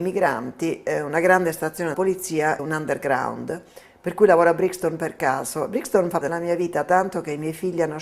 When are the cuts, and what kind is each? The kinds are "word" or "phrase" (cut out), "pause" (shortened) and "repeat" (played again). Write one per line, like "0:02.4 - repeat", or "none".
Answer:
0:01.9 - word
0:02.6 - word
0:06.2 - word